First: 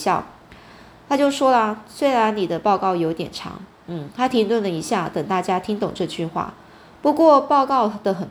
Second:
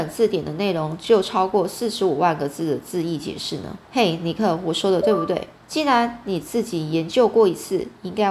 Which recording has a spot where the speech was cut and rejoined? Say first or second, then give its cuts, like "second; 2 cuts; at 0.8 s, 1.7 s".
second; 2 cuts; at 3.8 s, 5.5 s